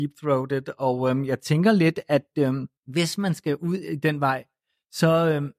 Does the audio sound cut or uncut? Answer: cut